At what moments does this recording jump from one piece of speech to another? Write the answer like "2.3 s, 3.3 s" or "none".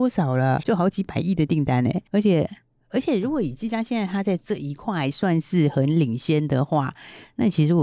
2.1 s